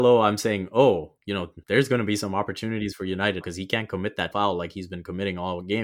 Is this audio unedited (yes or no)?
no